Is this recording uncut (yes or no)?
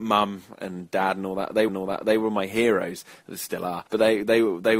no